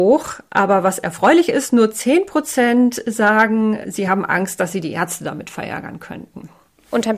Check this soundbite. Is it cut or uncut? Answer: uncut